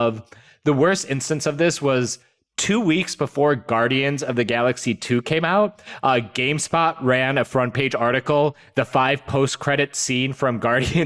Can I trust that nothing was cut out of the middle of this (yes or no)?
yes